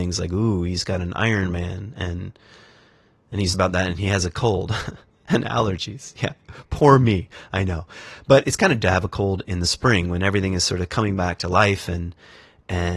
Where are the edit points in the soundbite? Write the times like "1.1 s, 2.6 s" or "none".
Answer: 3.5 s, 8.4 s, 8.8 s

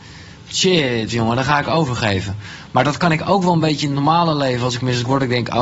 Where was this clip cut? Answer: none

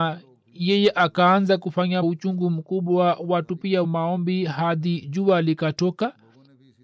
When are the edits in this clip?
2.0 s, 3.8 s

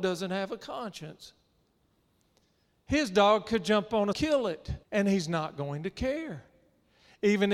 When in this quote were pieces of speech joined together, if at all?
4.1 s, 4.8 s

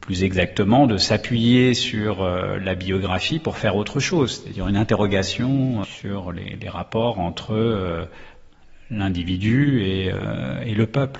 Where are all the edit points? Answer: 5.8 s

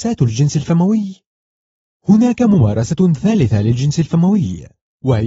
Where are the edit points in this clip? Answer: none

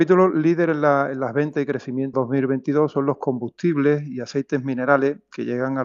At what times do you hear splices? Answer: 2.1 s

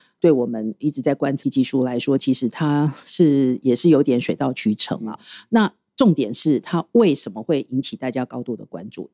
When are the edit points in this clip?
1.4 s, 5.1 s

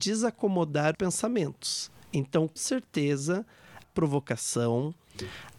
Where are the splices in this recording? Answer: 0.9 s, 2.6 s, 3.8 s

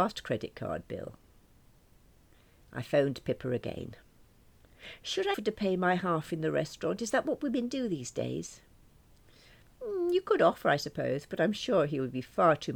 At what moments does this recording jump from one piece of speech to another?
5.3 s

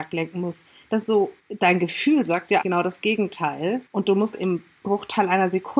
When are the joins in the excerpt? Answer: 1.0 s, 1.4 s, 2.6 s, 3.9 s, 4.3 s

